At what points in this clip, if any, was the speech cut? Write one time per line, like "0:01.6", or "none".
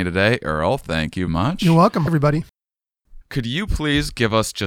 0:01.3
0:02.1
0:03.2